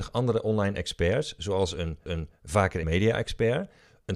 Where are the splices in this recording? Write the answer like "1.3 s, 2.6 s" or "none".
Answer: 2.1 s, 2.8 s